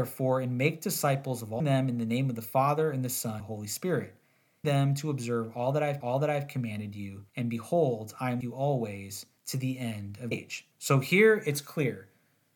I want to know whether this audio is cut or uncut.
cut